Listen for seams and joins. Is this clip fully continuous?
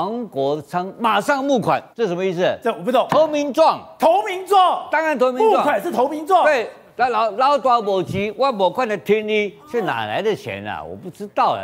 no; 2 cuts; at 1.9 s, 9.6 s

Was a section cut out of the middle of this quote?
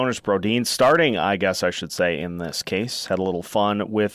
no; 0 cuts

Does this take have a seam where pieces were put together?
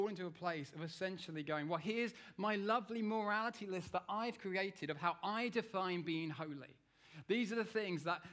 no; 0 cuts

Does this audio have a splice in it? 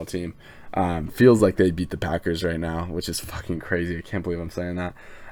no; 0 cuts

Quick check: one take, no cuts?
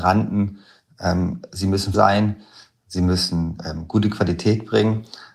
no; 1 cut; at 1.9 s

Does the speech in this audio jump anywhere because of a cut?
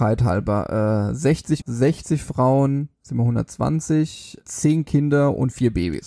yes; 3 cuts; at 1.6 s, 2.9 s, 4.4 s

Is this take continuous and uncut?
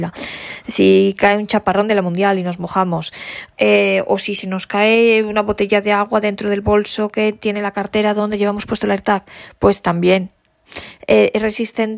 yes; 0 cuts

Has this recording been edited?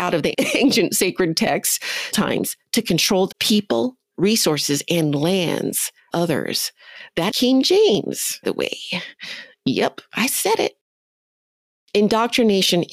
yes; 6 cuts; at 2.1 s, 3.3 s, 4.1 s, 6.1 s, 7.3 s, 8.4 s

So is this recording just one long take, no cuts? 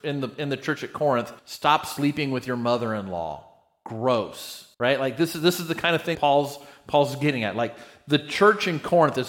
no; 3 cuts; at 1.4 s, 4.7 s, 6.1 s

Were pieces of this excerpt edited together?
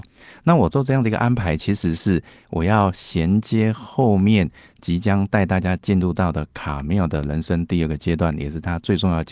no; 0 cuts

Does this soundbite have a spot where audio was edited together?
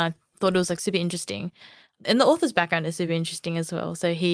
no; 0 cuts

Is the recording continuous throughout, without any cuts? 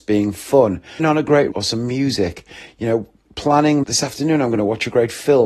no; 3 cuts; at 1.0 s, 1.5 s, 3.8 s

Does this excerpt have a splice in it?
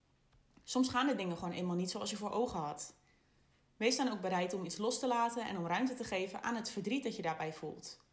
no; 0 cuts

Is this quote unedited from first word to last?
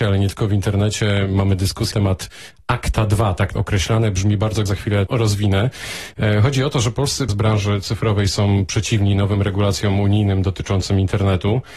no; 5 cuts; at 1.9 s, 3.6 s, 4.7 s, 5.1 s, 7.3 s

